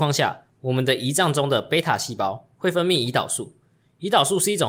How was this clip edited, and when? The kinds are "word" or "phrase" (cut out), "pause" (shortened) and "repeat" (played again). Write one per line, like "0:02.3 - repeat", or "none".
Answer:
none